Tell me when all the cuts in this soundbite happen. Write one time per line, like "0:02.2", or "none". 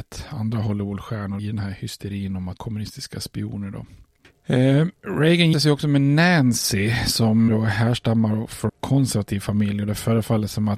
0:01.4
0:02.6
0:05.5
0:07.5
0:08.7